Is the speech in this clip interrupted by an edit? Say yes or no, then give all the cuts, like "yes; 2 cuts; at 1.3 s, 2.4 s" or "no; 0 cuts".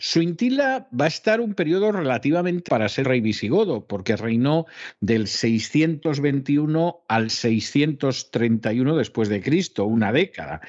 yes; 2 cuts; at 2.7 s, 3.0 s